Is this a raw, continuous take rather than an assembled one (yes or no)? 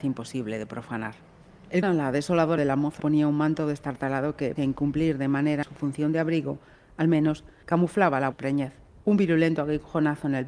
no